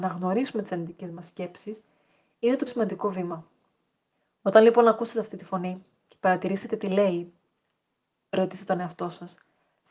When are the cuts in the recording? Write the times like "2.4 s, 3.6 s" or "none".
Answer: 2.7 s